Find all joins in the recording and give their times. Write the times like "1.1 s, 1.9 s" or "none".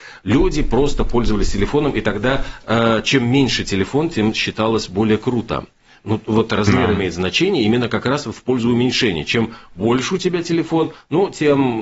none